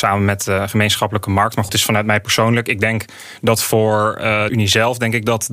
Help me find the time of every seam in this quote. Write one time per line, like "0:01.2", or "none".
0:01.7
0:04.5